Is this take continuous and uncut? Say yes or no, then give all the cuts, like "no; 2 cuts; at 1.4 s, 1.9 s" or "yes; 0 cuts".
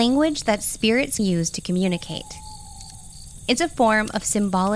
no; 1 cut; at 1.2 s